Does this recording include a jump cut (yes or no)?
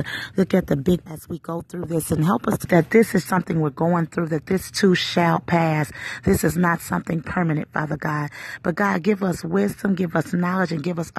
yes